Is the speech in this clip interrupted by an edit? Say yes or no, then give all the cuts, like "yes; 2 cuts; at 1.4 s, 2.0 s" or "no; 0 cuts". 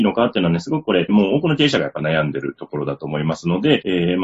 yes; 1 cut; at 1.1 s